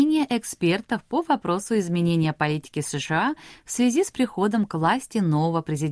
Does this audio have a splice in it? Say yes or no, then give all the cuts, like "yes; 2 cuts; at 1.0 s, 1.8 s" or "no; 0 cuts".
no; 0 cuts